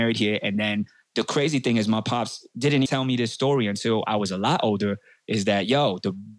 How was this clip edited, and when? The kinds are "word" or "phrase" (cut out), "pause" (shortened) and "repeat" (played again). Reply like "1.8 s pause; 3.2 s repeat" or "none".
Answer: 2.9 s word